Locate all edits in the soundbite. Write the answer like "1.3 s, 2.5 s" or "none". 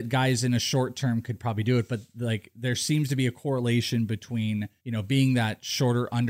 4.8 s